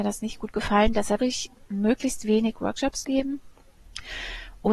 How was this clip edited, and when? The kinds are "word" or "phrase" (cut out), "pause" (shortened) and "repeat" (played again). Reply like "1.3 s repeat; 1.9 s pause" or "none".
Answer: 1.2 s word; 3.0 s word